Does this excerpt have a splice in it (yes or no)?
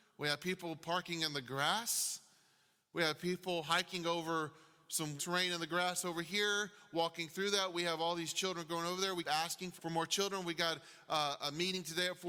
yes